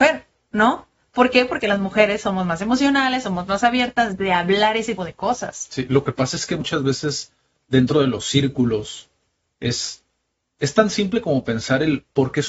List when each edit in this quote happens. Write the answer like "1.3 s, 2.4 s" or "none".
5.0 s

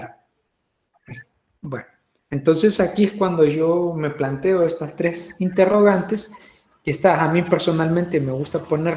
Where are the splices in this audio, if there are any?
none

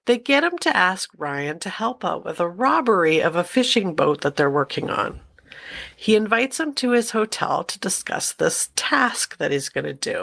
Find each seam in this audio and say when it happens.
none

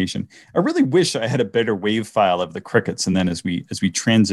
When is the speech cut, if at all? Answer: none

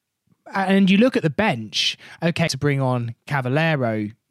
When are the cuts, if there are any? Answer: 2.5 s

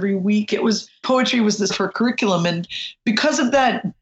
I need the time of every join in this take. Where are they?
1.0 s, 1.7 s

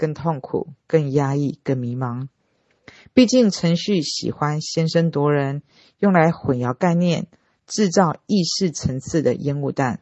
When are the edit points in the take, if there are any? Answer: none

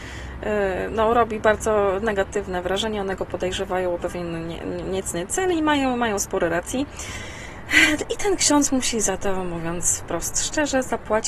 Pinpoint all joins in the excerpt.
none

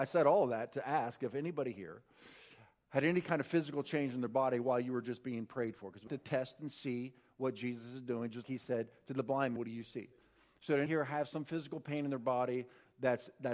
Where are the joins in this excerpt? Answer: 6.1 s, 8.4 s, 9.6 s, 10.9 s

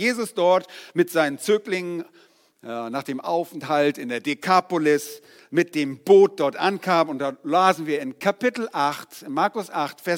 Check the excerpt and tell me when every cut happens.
none

